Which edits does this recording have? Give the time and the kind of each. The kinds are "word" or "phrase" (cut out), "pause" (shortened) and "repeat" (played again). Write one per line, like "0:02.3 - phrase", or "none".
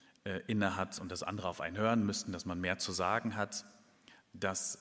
none